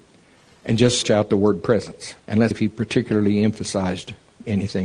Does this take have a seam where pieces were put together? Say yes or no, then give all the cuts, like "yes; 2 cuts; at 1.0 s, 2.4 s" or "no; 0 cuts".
yes; 3 cuts; at 1.0 s, 2.2 s, 2.5 s